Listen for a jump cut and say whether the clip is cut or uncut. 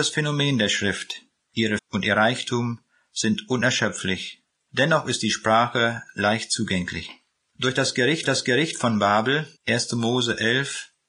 cut